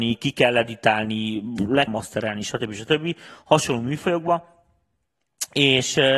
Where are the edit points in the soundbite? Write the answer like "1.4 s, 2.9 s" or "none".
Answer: 1.9 s